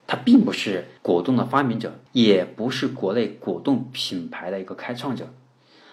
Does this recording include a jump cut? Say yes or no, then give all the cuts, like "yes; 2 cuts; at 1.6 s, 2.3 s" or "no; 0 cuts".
yes; 2 cuts; at 1.0 s, 2.1 s